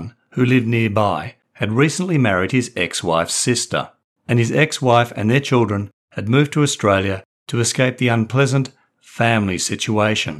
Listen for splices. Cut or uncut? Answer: uncut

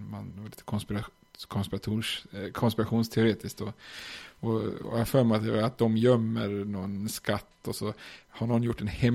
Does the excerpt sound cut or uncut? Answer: uncut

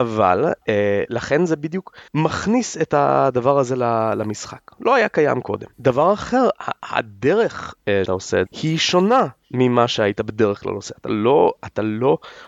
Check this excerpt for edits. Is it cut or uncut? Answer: cut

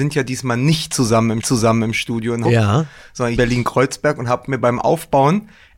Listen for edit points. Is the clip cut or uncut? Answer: cut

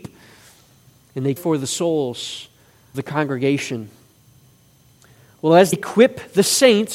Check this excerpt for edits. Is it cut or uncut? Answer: cut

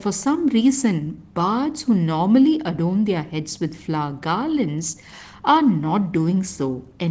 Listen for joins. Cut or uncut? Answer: uncut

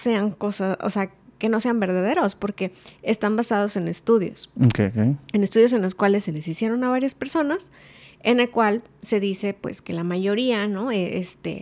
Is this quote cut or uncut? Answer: uncut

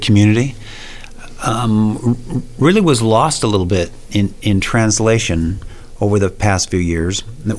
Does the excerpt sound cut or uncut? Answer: uncut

